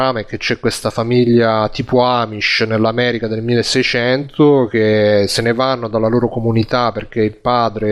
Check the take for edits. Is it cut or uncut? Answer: uncut